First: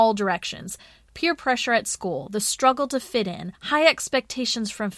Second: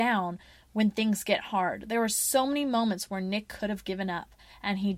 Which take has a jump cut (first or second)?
first